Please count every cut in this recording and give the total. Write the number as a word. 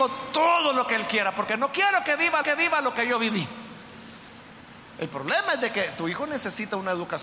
one